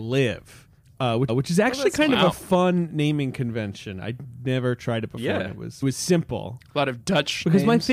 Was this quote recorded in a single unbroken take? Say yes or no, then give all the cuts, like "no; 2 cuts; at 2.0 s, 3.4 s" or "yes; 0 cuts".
no; 2 cuts; at 1.3 s, 5.8 s